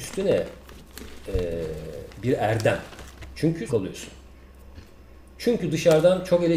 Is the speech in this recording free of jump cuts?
no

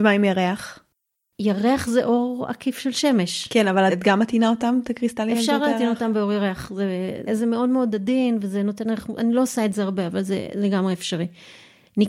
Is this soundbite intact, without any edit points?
no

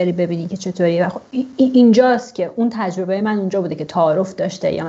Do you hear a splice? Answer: no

